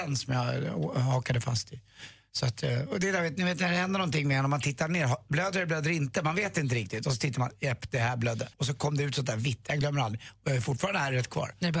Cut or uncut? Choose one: cut